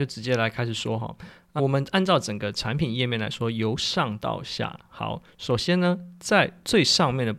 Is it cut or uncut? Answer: cut